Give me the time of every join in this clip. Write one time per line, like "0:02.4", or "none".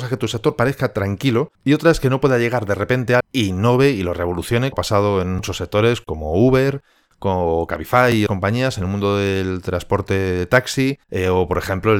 0:01.5
0:03.2
0:04.7
0:08.3
0:11.0